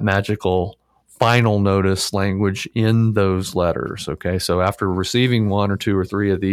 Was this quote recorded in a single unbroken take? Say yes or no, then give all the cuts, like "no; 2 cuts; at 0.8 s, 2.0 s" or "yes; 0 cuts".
yes; 0 cuts